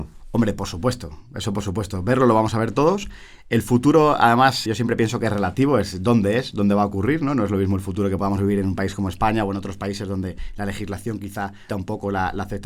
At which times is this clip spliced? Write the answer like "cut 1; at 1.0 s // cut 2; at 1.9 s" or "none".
cut 1; at 4.7 s // cut 2; at 11.7 s